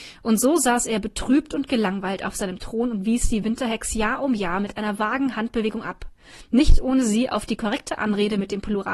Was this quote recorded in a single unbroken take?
yes; 0 cuts

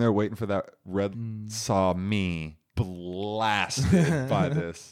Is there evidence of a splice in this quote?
yes; 2 cuts; at 1.1 s, 2.7 s

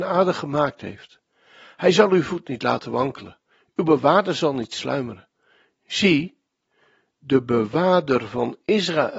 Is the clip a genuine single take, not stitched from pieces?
yes; 0 cuts

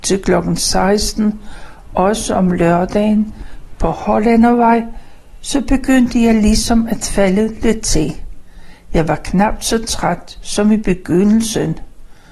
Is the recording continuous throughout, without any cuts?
yes; 0 cuts

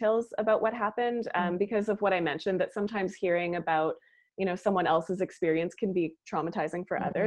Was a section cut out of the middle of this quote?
no; 0 cuts

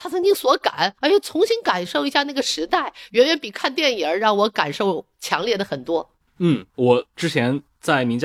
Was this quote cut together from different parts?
yes; 2 cuts; at 1.0 s, 6.7 s

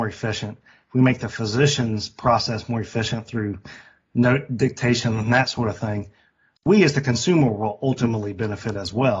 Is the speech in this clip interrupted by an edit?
no; 0 cuts

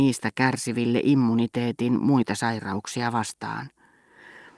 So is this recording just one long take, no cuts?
yes; 0 cuts

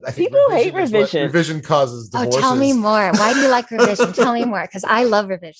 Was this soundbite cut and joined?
no; 0 cuts

